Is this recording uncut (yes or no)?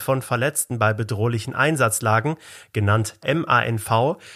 no